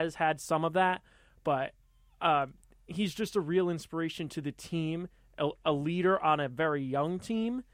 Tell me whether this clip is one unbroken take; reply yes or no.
yes